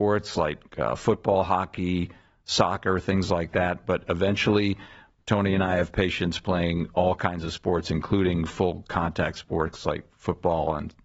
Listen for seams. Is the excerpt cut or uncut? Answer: uncut